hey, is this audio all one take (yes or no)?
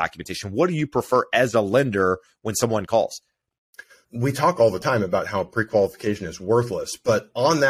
yes